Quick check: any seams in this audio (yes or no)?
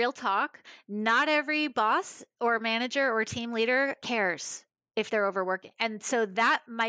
no